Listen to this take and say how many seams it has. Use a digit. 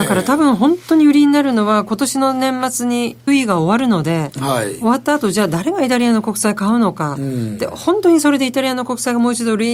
1